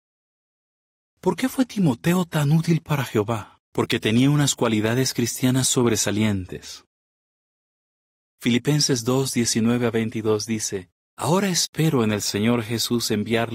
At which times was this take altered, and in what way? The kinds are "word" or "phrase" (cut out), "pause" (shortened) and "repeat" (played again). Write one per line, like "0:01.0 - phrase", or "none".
0:03.6 - pause
0:11.0 - pause

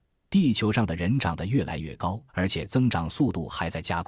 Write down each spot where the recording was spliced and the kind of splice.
0:02.3 - pause

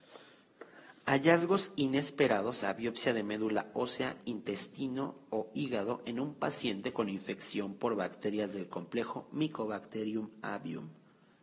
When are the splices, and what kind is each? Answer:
0:02.6 - word

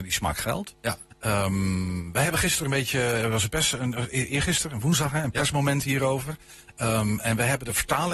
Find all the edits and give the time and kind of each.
none

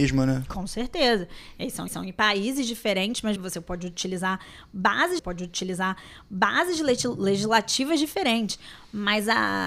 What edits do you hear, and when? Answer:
0:01.9 - repeat
0:03.4 - word
0:05.2 - repeat

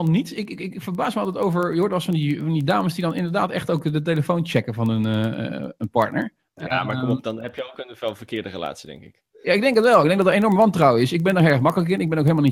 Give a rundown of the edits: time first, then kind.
0:06.4 - pause

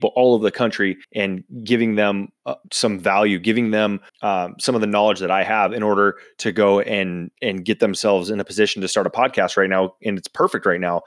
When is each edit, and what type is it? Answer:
0:01.0 - pause
0:02.6 - pause
0:04.1 - pause
0:07.3 - pause

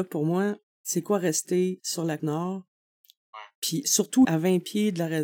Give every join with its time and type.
0:02.2 - word
0:04.2 - word

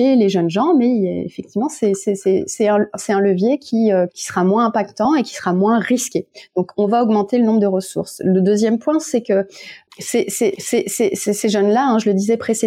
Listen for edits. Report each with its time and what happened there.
0:04.1 - word
0:10.5 - repeat

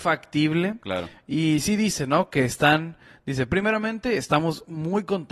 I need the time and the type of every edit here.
none

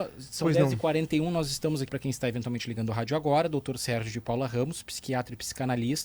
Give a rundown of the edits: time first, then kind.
0:01.9 - word

